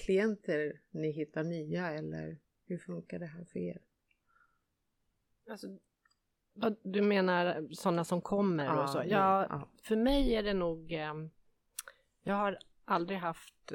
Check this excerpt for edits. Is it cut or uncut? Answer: uncut